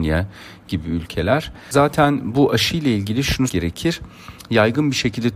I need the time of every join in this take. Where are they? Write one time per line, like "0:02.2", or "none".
0:03.5